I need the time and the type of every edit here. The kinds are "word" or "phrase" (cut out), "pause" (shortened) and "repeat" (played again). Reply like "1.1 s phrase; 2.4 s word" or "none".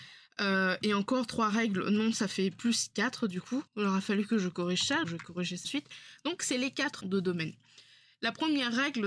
3.7 s pause; 5.0 s word; 5.6 s word; 7.0 s phrase